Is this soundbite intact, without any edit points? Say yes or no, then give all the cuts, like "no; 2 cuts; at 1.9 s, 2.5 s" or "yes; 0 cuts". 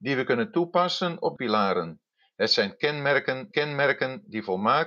no; 3 cuts; at 1.4 s, 2.1 s, 3.5 s